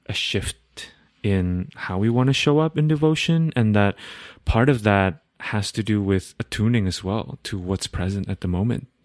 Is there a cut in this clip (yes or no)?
no